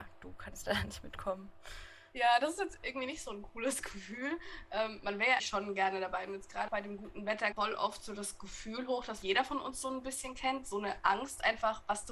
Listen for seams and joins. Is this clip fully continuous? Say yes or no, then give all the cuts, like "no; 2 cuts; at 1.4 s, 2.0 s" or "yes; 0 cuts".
no; 5 cuts; at 2.8 s, 5.4 s, 6.7 s, 7.5 s, 9.2 s